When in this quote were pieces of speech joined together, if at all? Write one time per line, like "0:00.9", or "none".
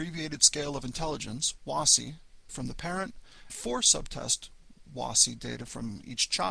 0:02.5
0:03.5